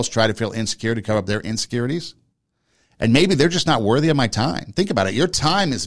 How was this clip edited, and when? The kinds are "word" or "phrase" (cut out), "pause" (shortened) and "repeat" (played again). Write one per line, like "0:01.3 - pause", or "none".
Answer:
none